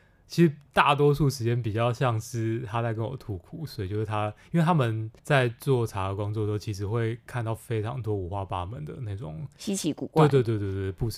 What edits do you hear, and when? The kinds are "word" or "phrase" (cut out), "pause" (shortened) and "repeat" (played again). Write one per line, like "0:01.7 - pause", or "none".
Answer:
0:05.2 - pause